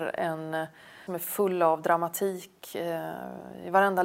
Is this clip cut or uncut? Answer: cut